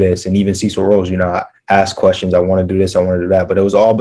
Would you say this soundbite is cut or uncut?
uncut